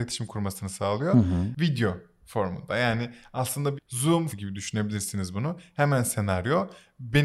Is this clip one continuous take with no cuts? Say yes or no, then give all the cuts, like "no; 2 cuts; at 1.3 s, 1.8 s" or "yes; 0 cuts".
no; 2 cuts; at 3.8 s, 4.3 s